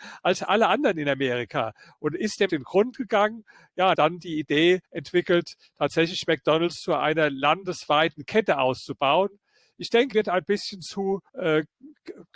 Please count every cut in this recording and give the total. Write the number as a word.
five